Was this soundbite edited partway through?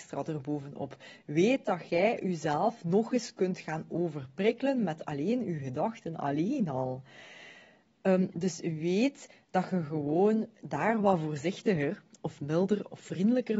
no; 0 cuts

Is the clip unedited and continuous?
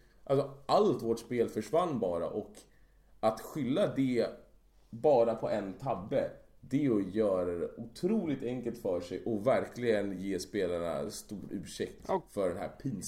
yes; 0 cuts

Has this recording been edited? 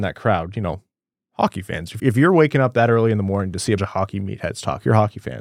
yes; 2 cuts; at 2.0 s, 3.8 s

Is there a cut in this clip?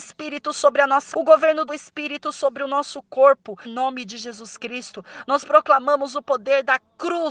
yes; 3 cuts; at 1.1 s, 1.7 s, 3.6 s

